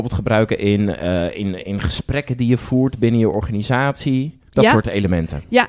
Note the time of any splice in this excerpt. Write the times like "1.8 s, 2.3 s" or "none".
4.5 s